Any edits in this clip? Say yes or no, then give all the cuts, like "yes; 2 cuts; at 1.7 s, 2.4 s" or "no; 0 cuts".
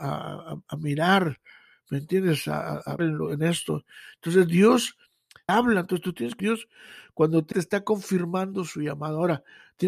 yes; 4 cuts; at 3.0 s, 5.5 s, 6.4 s, 7.5 s